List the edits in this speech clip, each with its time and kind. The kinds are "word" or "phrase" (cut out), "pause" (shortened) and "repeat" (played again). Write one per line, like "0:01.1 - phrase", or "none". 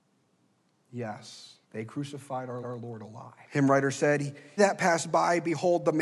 0:01.6 - pause
0:02.6 - repeat
0:03.4 - pause
0:04.6 - word